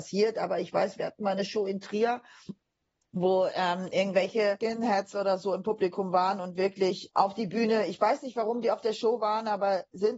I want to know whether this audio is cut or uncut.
uncut